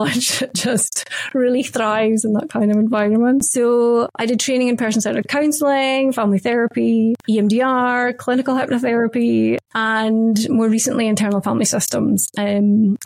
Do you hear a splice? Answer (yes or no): no